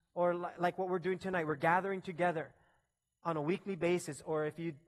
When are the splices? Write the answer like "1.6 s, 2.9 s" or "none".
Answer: none